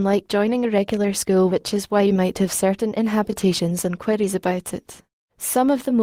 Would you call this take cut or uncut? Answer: uncut